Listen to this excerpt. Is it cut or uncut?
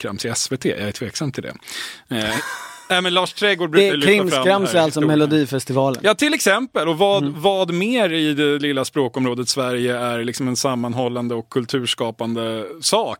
uncut